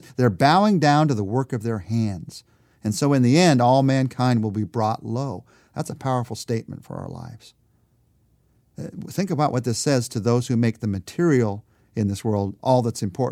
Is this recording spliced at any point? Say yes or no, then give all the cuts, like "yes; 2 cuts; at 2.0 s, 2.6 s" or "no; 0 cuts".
no; 0 cuts